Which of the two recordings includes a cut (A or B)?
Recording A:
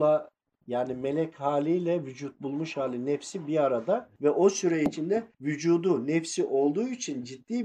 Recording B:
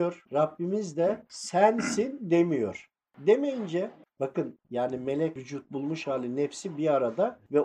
B